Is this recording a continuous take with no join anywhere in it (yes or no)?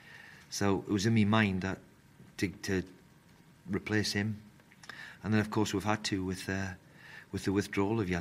yes